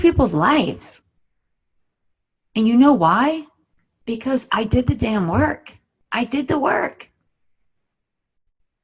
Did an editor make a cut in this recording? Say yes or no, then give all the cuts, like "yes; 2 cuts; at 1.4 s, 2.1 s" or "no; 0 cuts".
no; 0 cuts